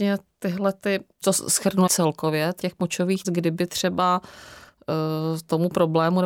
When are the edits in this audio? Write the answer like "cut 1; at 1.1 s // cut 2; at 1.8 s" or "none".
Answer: cut 1; at 1.2 s // cut 2; at 1.9 s // cut 3; at 2.6 s // cut 4; at 3.2 s